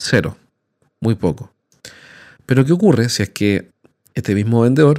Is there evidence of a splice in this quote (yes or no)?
no